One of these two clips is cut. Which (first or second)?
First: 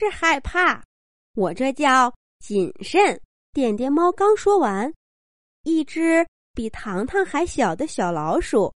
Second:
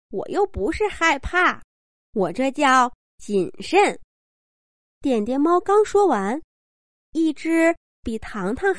first